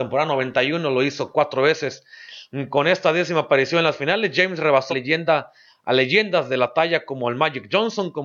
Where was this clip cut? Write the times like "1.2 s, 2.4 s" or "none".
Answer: 4.9 s